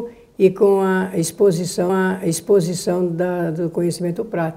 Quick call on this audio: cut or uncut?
cut